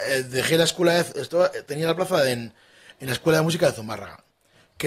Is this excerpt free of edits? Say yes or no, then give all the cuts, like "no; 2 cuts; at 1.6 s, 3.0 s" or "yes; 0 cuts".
yes; 0 cuts